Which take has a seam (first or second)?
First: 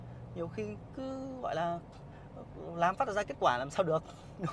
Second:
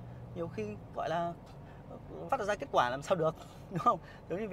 second